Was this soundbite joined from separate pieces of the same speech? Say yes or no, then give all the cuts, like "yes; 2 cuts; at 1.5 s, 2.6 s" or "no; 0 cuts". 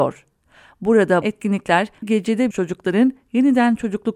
yes; 3 cuts; at 1.2 s, 2.0 s, 2.5 s